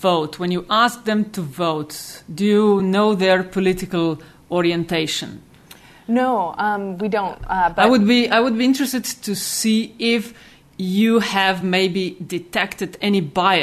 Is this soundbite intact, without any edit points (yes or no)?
yes